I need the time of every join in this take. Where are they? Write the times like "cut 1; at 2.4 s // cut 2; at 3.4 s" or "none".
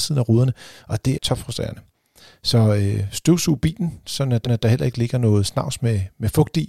cut 1; at 1.1 s // cut 2; at 4.4 s